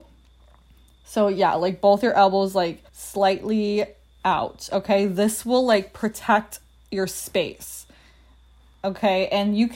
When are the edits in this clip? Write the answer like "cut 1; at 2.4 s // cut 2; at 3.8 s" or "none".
cut 1; at 2.9 s